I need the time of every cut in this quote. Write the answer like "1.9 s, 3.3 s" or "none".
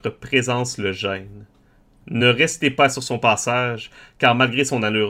none